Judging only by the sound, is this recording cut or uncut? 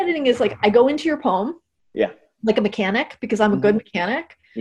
uncut